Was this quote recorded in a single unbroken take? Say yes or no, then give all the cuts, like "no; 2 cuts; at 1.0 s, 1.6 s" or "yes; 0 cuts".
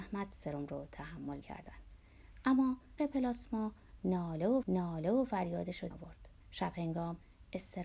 no; 5 cuts; at 1.4 s, 3.0 s, 4.6 s, 5.9 s, 6.4 s